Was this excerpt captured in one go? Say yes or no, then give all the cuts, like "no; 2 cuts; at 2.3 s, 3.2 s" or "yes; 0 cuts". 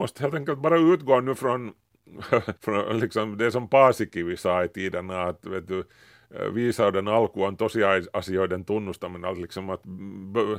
no; 1 cut; at 2.6 s